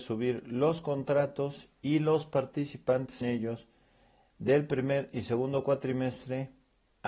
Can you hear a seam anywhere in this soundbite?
yes; 1 cut; at 3.2 s

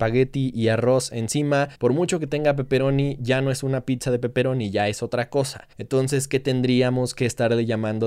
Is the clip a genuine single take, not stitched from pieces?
no; 2 cuts; at 1.7 s, 5.7 s

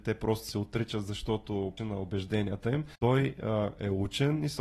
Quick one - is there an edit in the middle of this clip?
yes; 2 cuts; at 1.8 s, 2.9 s

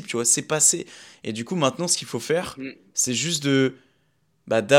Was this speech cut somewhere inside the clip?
no; 0 cuts

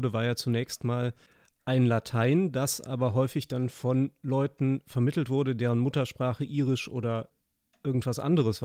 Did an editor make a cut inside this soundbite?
no; 0 cuts

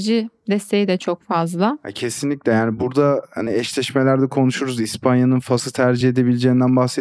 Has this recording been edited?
no; 0 cuts

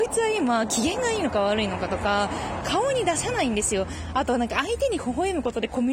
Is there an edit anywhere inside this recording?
yes; 1 cut; at 2.6 s

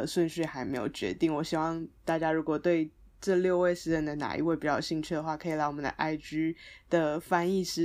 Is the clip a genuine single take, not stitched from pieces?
yes; 0 cuts

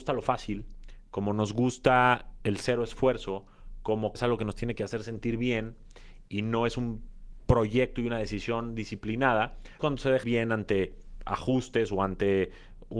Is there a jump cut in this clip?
yes; 3 cuts; at 4.2 s, 9.8 s, 10.2 s

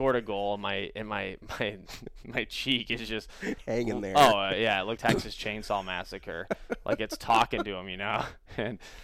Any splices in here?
yes; 1 cut; at 5.0 s

